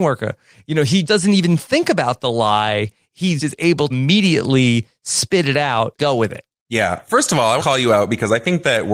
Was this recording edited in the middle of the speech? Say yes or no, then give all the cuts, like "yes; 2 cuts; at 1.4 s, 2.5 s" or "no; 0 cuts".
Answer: yes; 5 cuts; at 1.0 s, 3.4 s, 3.9 s, 6.0 s, 7.6 s